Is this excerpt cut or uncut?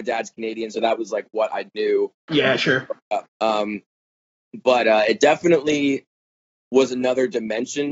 cut